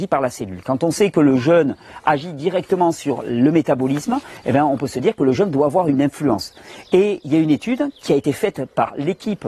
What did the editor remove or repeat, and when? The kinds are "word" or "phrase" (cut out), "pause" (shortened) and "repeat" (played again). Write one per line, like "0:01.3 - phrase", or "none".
none